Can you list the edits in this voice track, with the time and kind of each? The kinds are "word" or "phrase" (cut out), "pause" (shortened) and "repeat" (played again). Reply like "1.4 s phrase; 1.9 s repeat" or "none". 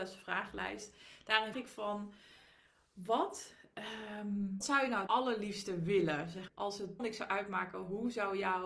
1.5 s word; 4.6 s word; 5.1 s word; 6.5 s word; 7.0 s word